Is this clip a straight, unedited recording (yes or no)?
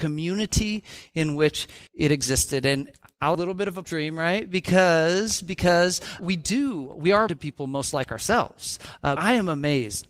no